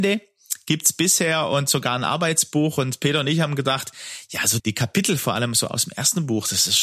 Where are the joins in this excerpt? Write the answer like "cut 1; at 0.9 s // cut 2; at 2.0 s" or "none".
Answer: cut 1; at 4.6 s